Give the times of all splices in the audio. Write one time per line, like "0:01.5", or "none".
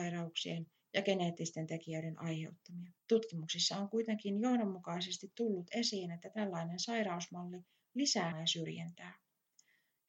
0:03.0
0:08.3

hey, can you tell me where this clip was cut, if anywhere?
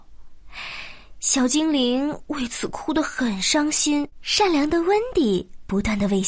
0:04.1

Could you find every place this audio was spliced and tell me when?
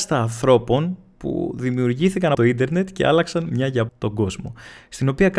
0:02.3
0:03.9

